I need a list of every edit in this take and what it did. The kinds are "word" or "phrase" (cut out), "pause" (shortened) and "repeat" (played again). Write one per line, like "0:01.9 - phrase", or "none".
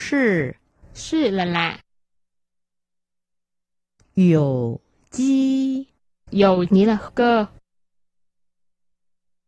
0:06.7 - word
0:07.1 - word